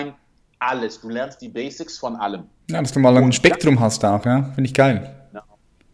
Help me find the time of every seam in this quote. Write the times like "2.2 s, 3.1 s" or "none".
none